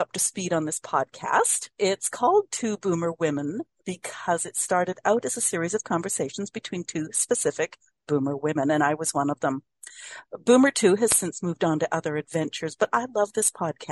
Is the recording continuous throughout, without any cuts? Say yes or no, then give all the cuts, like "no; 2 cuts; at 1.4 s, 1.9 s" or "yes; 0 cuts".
no; 1 cut; at 1.7 s